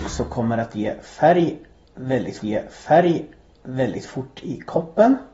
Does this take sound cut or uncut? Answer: cut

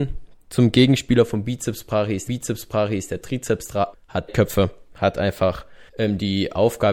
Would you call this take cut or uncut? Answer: cut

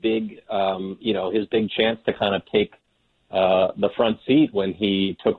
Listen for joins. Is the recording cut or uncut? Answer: uncut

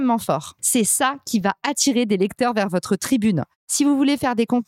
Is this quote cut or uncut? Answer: uncut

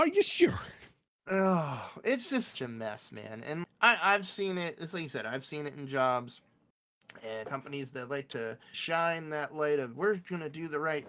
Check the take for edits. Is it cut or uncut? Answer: cut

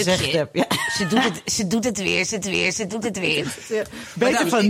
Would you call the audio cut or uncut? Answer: cut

